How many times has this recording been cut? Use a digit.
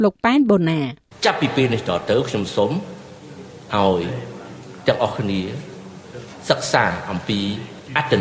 1